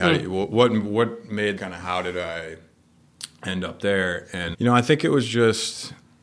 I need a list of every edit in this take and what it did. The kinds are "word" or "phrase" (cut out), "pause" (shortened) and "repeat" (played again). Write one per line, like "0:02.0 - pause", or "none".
0:01.6 - phrase
0:04.5 - word